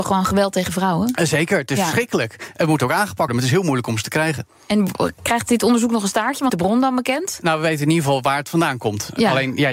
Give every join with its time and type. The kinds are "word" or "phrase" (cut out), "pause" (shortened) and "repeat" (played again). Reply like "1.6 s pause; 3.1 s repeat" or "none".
3.3 s word; 6.5 s phrase